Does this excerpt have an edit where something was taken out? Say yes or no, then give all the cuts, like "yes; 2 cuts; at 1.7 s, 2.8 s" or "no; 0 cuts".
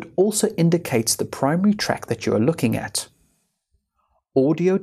no; 0 cuts